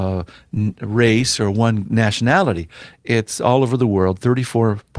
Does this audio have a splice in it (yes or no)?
no